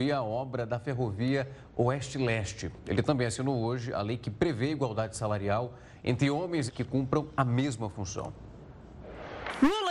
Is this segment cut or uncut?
cut